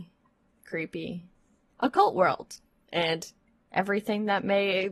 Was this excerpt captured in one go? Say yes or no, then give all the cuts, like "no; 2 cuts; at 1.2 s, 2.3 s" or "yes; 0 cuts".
yes; 0 cuts